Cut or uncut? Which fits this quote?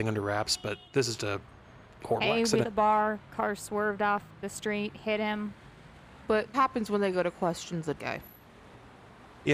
cut